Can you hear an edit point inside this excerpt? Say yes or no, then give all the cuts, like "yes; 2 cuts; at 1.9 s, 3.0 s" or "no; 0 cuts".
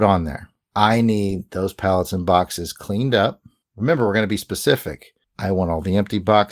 no; 0 cuts